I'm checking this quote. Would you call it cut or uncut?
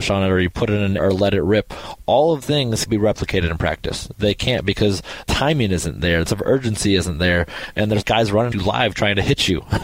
cut